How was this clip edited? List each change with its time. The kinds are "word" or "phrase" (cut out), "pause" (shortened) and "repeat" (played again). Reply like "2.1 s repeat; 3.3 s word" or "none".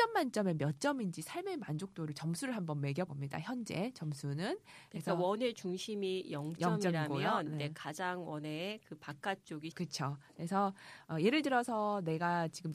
3.1 s word; 9.7 s word